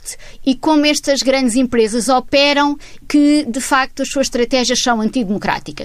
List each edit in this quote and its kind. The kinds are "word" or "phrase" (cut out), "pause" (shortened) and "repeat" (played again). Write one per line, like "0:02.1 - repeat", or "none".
0:03.0 - word